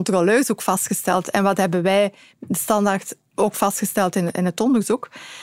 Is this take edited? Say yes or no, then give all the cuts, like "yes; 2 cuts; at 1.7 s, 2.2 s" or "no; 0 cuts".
no; 0 cuts